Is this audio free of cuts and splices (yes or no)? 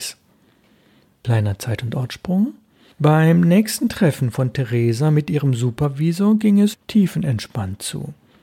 yes